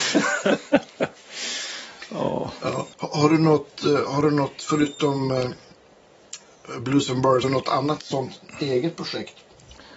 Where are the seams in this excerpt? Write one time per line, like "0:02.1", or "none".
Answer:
0:02.9
0:07.4